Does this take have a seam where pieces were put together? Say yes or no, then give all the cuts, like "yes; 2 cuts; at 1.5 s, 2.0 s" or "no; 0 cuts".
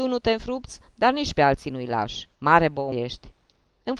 yes; 2 cuts; at 2.3 s, 2.9 s